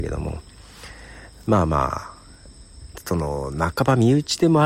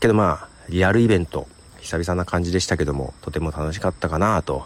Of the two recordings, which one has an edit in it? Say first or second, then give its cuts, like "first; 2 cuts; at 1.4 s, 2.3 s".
second; 2 cuts; at 1.6 s, 3.2 s